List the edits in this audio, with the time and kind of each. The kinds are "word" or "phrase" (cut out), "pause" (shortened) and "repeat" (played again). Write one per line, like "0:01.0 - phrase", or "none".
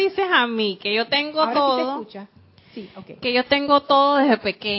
none